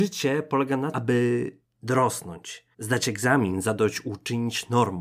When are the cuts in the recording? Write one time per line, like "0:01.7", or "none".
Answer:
0:00.9
0:02.7